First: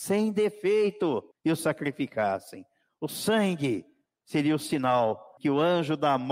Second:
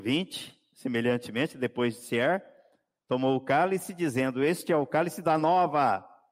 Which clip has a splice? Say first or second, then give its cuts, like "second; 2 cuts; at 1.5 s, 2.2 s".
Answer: first; 2 cuts; at 1.3 s, 5.4 s